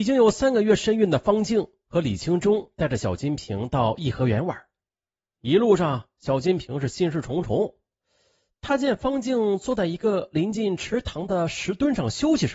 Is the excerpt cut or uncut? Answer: uncut